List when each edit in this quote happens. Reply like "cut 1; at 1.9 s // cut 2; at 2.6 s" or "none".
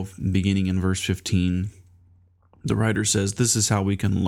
none